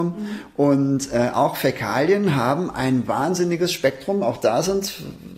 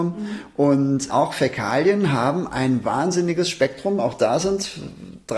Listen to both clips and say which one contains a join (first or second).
second